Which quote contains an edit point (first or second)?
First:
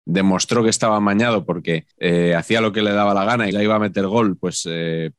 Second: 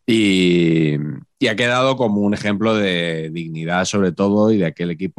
first